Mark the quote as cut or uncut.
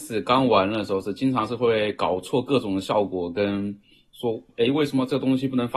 uncut